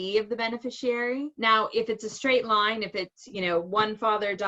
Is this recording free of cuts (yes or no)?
yes